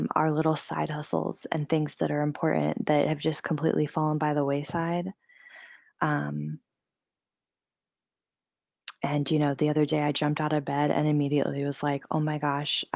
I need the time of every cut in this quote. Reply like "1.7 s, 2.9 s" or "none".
none